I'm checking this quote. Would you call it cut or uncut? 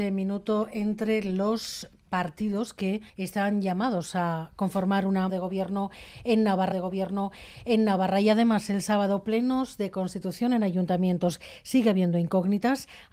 cut